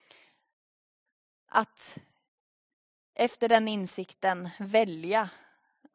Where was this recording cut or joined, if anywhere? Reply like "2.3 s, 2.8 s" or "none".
none